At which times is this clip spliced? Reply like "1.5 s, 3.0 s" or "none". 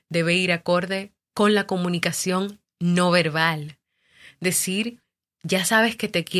none